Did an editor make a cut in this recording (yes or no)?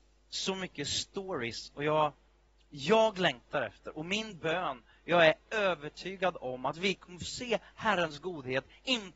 no